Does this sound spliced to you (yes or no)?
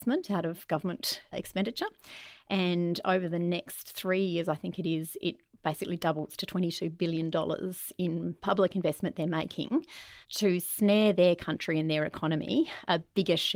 yes